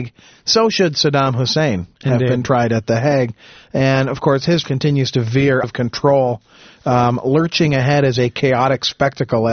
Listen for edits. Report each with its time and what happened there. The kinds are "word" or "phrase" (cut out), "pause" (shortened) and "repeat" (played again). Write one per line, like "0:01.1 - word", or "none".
0:04.6 - word
0:05.6 - word